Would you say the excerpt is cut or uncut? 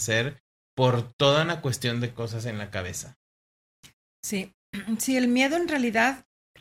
uncut